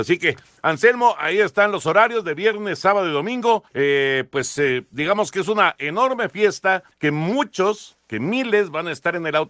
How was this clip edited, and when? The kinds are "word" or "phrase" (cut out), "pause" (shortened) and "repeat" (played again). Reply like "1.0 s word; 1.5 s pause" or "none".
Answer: 3.7 s pause; 6.9 s pause